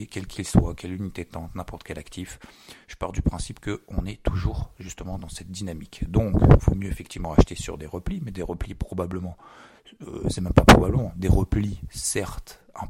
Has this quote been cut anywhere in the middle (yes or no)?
no